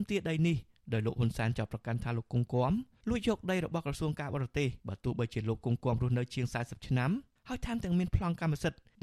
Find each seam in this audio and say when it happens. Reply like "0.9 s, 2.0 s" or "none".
4.8 s